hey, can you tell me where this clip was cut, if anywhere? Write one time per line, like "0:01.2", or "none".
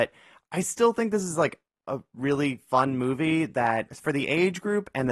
none